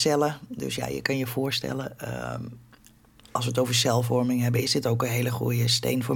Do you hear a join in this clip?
no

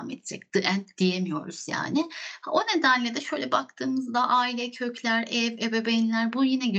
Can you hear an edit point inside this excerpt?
no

